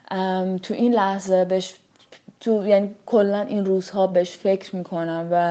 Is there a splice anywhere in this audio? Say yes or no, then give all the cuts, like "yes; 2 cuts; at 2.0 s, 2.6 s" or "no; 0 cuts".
no; 0 cuts